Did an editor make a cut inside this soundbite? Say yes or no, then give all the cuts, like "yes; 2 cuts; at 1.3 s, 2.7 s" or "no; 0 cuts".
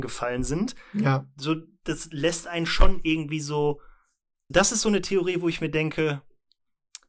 yes; 1 cut; at 4.5 s